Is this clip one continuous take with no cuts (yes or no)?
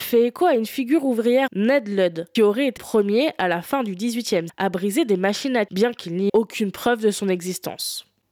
no